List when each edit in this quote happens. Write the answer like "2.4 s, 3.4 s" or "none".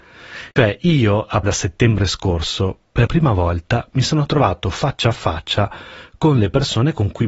1.4 s, 3.1 s